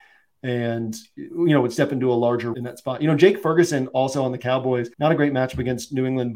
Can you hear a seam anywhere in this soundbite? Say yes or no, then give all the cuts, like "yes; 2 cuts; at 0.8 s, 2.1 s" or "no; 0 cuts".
yes; 2 cuts; at 2.5 s, 4.9 s